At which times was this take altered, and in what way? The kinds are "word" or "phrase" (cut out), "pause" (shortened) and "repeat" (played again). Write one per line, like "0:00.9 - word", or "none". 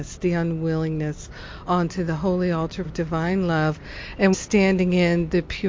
0:01.7 - word
0:02.8 - word
0:04.3 - word